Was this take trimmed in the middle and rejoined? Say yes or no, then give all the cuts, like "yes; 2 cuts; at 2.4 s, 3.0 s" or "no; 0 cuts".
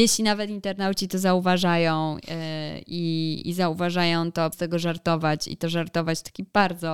yes; 2 cuts; at 3.4 s, 4.5 s